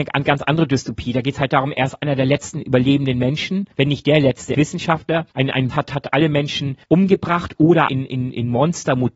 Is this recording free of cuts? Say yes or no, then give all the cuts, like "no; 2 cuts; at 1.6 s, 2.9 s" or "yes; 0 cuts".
no; 6 cuts; at 3.7 s, 4.5 s, 5.3 s, 5.7 s, 6.8 s, 7.9 s